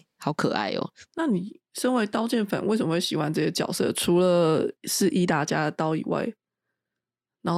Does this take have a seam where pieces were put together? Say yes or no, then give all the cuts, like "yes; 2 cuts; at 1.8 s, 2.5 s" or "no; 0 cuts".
yes; 1 cut; at 4.8 s